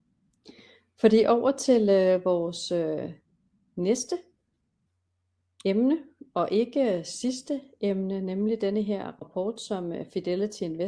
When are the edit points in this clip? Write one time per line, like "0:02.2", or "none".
none